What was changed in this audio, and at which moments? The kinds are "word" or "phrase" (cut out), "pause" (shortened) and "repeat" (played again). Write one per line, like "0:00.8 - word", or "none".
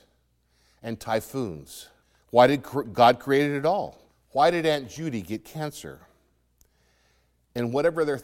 0:02.0 - pause
0:04.1 - pause